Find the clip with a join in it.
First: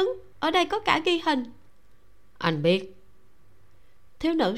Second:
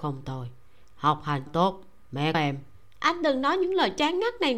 second; 2 cuts; at 1.5 s, 2.3 s

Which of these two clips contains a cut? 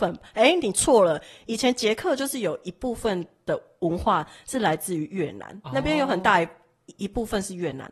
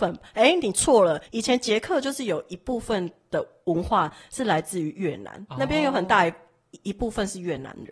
second; 1 cut; at 1.3 s

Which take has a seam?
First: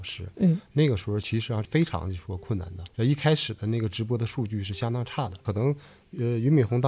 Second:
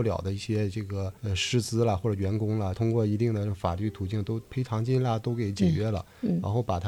second; 1 cut; at 1.2 s

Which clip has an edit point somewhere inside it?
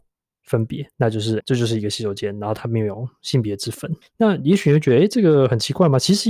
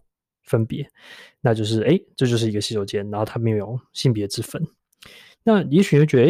first; 3 cuts; at 0.9 s, 1.4 s, 4.0 s

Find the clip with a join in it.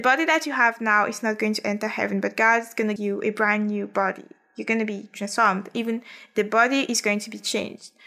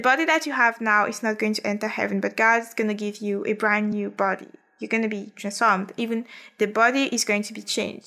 first; 1 cut; at 3.0 s

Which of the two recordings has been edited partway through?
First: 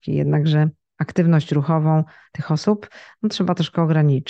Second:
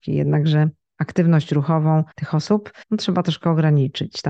second; 2 cuts; at 2.1 s, 2.8 s

